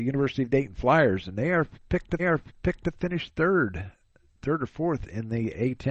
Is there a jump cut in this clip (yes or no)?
yes